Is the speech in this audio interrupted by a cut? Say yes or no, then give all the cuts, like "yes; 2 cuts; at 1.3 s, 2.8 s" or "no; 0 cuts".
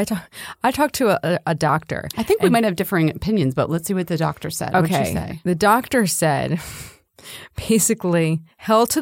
no; 0 cuts